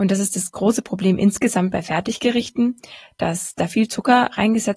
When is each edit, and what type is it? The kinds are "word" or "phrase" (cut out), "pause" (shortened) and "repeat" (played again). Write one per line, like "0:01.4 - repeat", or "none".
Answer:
none